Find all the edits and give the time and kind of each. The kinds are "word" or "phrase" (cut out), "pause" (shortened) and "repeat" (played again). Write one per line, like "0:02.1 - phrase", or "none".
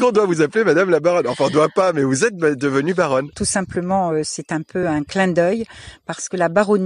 none